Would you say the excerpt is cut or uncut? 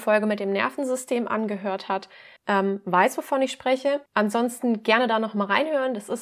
cut